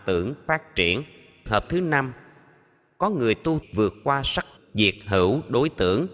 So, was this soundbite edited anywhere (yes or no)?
yes